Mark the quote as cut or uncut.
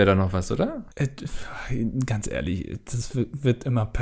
cut